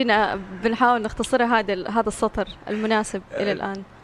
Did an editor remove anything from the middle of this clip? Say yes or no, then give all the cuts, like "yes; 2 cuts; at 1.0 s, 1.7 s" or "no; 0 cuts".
no; 0 cuts